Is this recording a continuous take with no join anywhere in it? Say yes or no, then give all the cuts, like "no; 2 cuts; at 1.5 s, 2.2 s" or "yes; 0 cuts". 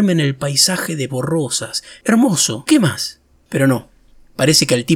no; 2 cuts; at 1.1 s, 2.7 s